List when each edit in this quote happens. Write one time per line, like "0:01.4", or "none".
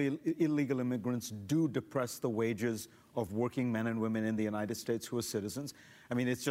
none